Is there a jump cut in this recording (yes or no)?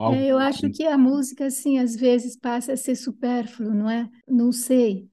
no